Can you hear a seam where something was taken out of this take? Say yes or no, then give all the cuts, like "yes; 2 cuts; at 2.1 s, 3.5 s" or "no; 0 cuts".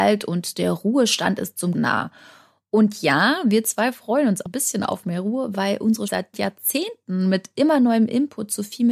yes; 3 cuts; at 1.7 s, 4.5 s, 6.1 s